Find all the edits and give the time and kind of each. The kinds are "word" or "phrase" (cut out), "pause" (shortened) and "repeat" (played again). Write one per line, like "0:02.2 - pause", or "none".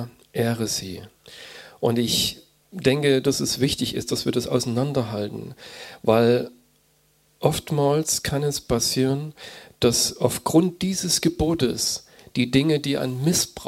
none